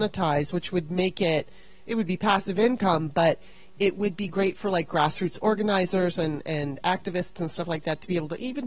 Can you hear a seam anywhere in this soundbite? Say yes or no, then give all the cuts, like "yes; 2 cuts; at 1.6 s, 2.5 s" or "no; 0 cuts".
no; 0 cuts